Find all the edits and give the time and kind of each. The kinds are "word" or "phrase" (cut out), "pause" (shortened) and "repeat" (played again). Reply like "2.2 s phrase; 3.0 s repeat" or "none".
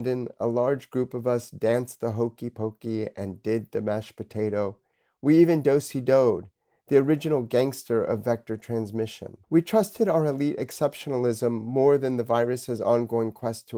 9.4 s pause

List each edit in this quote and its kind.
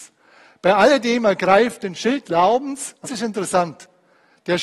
2.2 s word; 3.0 s word

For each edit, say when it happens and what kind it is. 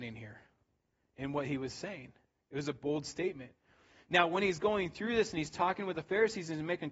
none

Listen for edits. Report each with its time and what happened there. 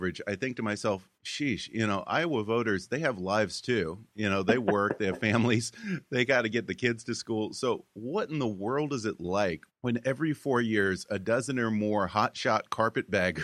1.1 s pause; 9.7 s pause

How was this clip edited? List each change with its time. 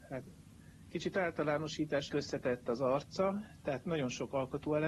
2.1 s phrase

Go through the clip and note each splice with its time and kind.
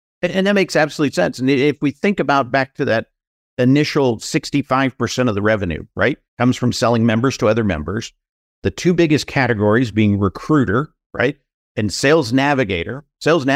6.3 s pause

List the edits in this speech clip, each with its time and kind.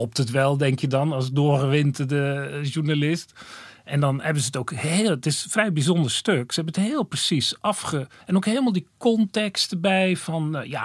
8.2 s pause

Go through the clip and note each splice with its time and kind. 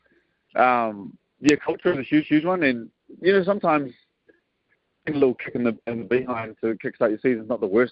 2.2 s repeat

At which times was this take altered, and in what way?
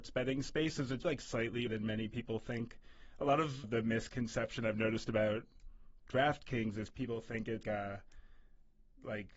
1.0 s word; 1.7 s word; 3.6 s word; 7.6 s word

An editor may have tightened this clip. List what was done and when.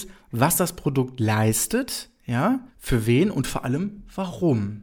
2.7 s pause

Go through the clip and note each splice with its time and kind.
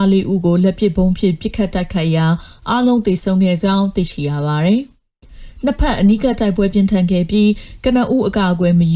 none

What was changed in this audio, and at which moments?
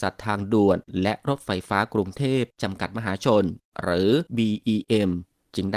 4.3 s pause

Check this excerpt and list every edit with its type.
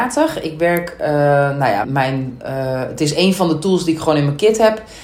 1.8 s word

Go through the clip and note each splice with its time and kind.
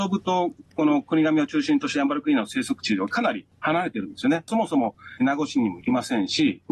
4.5 s phrase

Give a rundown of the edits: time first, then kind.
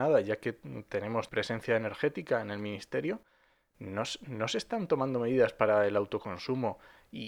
1.3 s word

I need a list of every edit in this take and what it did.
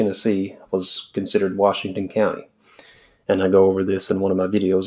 none

